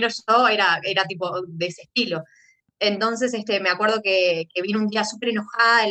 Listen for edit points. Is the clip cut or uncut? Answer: uncut